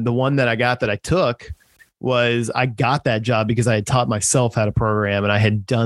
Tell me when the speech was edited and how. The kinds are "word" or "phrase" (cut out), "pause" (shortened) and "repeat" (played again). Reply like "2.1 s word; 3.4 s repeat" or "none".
none